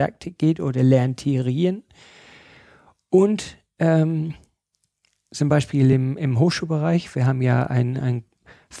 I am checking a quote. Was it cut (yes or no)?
no